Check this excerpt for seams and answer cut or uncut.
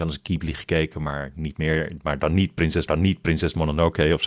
cut